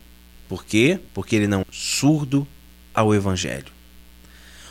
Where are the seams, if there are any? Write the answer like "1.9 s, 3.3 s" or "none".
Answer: 1.1 s, 1.6 s